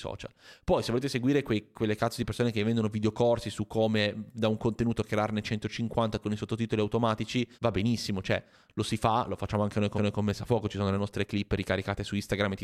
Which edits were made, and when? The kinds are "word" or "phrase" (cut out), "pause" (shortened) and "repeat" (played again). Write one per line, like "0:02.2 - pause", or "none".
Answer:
0:06.2 - phrase
0:07.5 - pause
0:10.0 - repeat